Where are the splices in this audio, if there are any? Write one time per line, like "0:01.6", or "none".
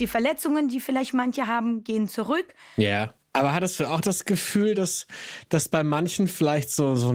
none